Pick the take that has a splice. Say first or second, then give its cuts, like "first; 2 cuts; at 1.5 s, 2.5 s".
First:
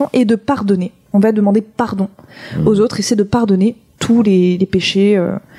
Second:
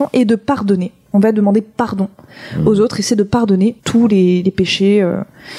second; 1 cut; at 3.8 s